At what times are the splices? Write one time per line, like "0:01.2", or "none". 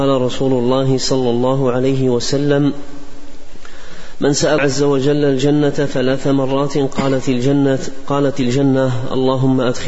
0:04.6